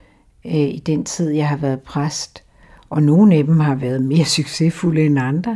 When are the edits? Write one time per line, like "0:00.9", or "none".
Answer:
none